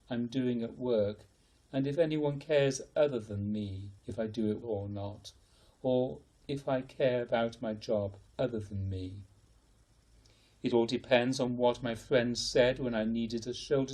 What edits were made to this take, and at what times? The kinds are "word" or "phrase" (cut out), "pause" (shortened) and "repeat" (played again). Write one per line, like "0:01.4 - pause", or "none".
0:04.0 - pause
0:04.6 - word
0:06.3 - word
0:08.3 - pause